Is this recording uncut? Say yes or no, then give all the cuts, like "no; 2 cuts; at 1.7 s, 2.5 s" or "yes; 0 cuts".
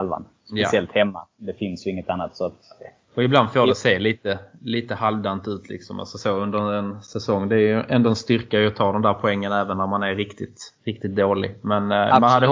yes; 0 cuts